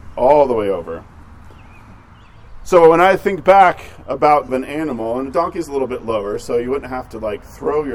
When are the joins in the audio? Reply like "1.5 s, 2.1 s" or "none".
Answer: 4.5 s